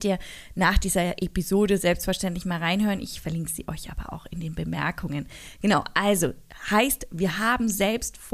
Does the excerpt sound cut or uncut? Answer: uncut